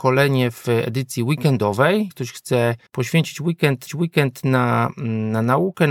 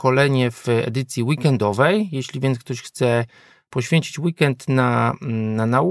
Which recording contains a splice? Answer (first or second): first